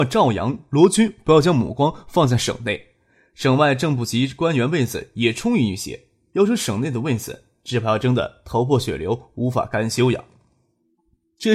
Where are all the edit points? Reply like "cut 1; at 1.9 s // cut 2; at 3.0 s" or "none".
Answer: none